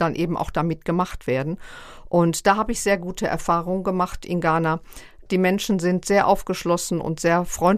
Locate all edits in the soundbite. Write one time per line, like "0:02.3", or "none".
none